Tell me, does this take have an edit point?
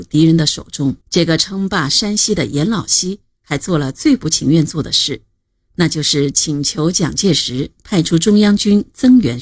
yes; 1 cut; at 1.0 s

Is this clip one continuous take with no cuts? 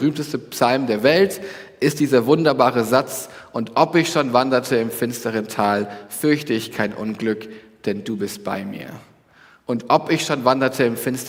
yes; 0 cuts

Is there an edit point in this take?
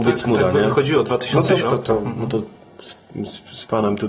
yes; 1 cut; at 1.6 s

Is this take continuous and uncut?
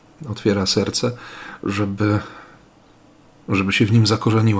yes; 0 cuts

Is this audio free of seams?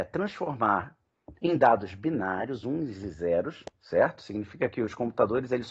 yes; 0 cuts

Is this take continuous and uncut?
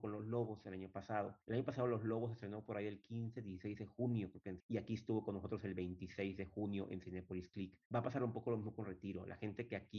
no; 3 cuts; at 1.4 s, 4.6 s, 7.9 s

